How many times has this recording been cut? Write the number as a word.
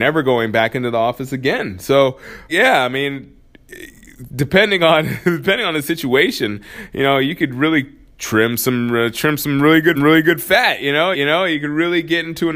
four